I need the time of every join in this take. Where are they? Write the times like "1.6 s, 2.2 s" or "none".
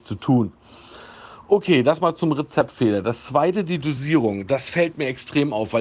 none